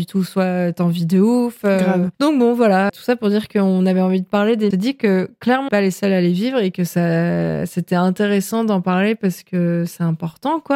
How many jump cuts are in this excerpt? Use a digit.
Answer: 4